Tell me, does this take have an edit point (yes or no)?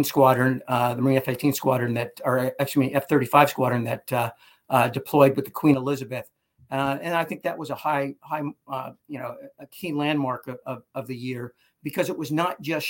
no